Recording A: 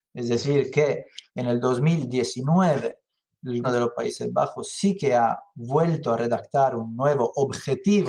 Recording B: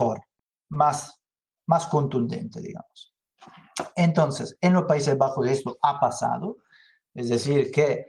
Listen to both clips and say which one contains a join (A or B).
A